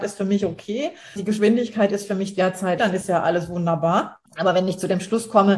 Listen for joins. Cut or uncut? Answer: cut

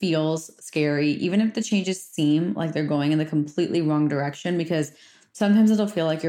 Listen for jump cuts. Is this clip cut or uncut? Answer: uncut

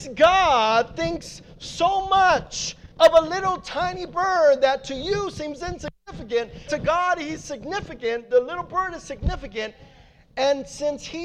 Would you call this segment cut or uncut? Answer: cut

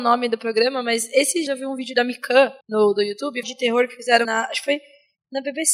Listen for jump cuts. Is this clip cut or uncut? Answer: cut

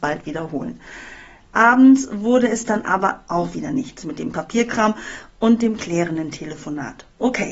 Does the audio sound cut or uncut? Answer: uncut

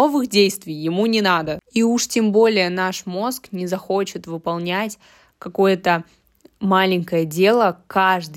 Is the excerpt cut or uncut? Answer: uncut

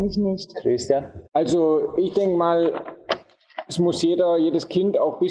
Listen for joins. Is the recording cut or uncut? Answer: cut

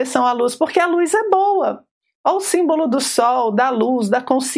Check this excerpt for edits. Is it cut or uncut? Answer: uncut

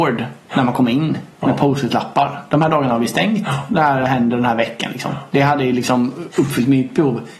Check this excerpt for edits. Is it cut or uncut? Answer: cut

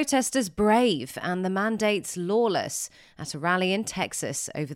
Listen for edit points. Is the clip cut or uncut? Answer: uncut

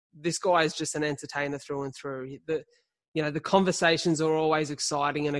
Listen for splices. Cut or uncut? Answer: uncut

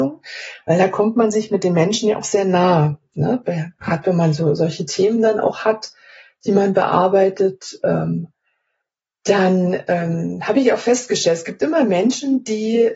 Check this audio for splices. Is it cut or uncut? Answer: uncut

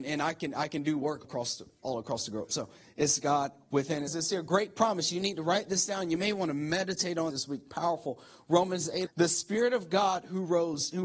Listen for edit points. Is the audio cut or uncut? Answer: cut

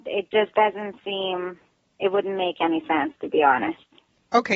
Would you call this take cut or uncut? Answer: uncut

